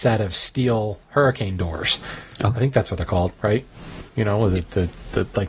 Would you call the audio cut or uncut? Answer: uncut